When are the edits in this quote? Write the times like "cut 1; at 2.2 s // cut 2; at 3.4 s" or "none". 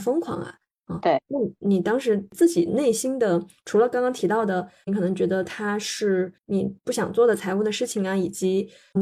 cut 1; at 6.4 s